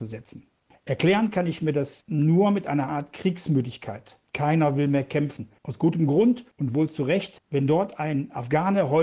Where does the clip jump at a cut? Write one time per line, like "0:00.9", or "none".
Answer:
0:04.3
0:06.5